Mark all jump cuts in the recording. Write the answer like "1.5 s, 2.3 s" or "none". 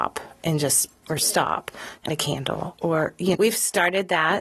1.0 s, 2.1 s, 3.3 s

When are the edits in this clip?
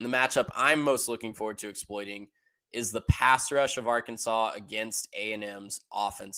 none

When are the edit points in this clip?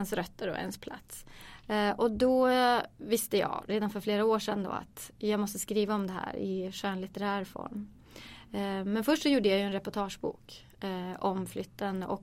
none

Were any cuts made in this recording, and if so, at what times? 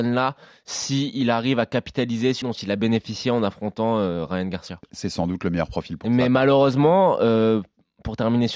2.4 s

